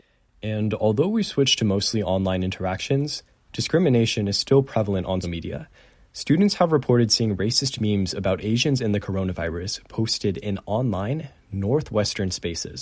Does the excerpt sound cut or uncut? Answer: cut